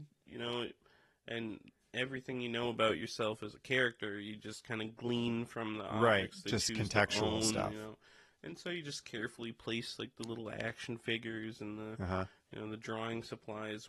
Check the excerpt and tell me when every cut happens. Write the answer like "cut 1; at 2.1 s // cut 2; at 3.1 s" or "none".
none